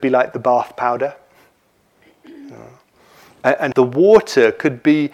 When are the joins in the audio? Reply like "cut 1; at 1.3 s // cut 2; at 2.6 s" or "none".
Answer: cut 1; at 3.7 s